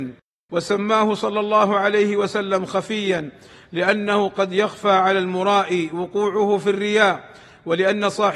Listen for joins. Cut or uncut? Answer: uncut